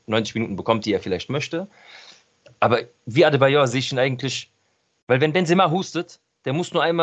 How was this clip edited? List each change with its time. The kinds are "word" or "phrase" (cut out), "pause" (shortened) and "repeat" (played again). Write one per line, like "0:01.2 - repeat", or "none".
none